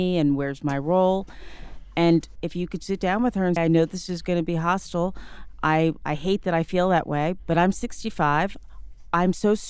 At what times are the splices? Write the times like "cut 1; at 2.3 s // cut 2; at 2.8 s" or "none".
cut 1; at 2.4 s // cut 2; at 3.6 s